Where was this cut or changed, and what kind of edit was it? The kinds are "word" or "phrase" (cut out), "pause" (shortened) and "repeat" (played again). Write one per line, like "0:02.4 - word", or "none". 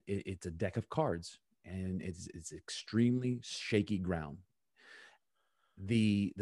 none